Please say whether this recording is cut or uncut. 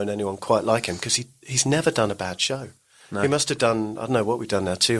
uncut